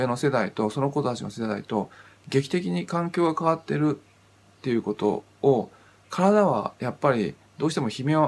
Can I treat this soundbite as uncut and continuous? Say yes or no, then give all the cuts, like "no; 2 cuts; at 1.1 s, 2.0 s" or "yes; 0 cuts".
yes; 0 cuts